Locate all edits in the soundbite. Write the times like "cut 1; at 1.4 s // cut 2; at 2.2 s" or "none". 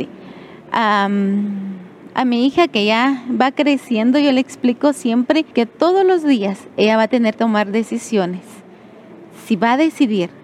cut 1; at 5.5 s // cut 2; at 7.3 s